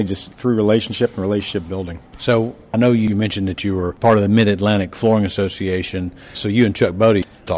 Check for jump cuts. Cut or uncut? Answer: uncut